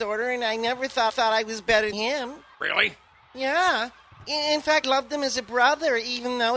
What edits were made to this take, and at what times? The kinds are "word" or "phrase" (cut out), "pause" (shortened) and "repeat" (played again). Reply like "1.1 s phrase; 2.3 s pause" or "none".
1.1 s repeat; 1.9 s word; 2.5 s pause; 4.8 s word

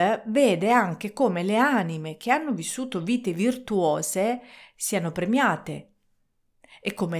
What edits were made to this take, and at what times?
none

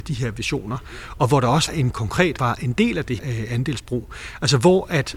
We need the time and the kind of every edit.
1.7 s word; 2.4 s phrase; 3.2 s word

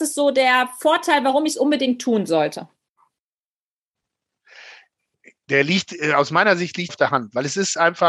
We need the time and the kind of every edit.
6.9 s word

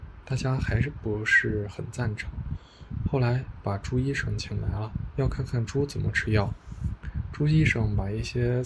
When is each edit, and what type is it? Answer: 5.1 s phrase

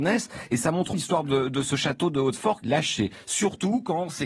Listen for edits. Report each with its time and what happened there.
0.9 s word; 2.6 s phrase

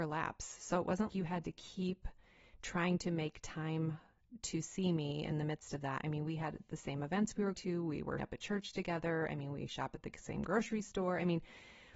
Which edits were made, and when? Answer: 1.1 s word; 7.5 s word; 8.2 s word

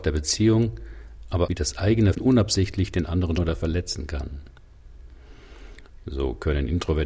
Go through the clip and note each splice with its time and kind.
1.5 s phrase; 2.1 s word; 3.4 s word

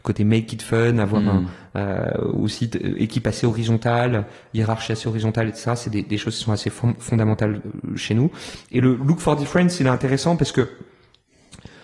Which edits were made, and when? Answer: none

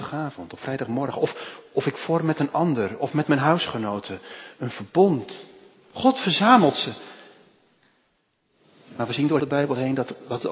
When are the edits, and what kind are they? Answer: 9.4 s word

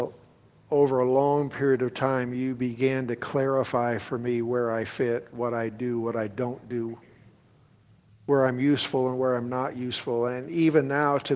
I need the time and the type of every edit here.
none

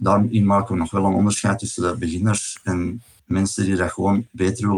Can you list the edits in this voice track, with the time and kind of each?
none

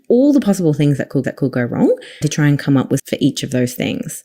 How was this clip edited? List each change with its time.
1.2 s repeat; 2.2 s word; 3.0 s word

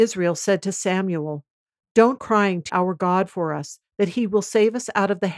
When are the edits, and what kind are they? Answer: 2.2 s word; 2.7 s word

